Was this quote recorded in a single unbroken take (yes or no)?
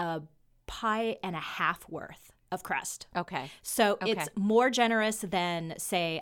yes